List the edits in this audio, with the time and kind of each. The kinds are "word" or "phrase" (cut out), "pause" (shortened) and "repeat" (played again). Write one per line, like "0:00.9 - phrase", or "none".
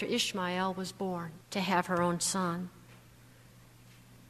0:01.4 - pause